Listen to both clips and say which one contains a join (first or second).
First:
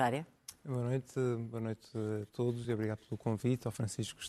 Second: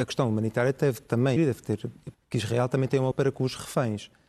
second